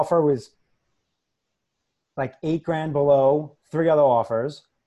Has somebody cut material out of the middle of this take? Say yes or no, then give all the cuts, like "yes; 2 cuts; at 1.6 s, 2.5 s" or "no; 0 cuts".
no; 0 cuts